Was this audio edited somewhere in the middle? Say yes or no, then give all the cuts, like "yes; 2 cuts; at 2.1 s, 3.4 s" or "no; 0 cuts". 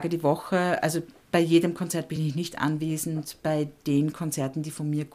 no; 0 cuts